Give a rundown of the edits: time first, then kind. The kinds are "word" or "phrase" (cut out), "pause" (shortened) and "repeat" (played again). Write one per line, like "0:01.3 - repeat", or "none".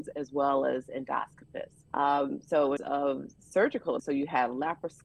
0:01.9 - pause
0:02.8 - phrase
0:04.0 - word

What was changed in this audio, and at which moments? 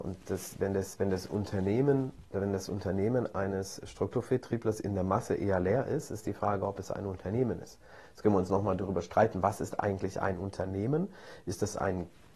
none

